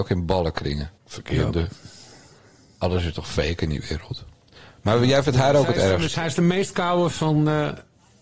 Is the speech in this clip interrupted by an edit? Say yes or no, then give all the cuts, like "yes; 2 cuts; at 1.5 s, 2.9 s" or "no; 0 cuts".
yes; 1 cut; at 1.0 s